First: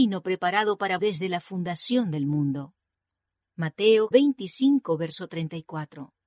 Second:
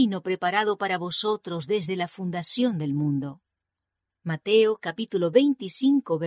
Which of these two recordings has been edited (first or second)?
first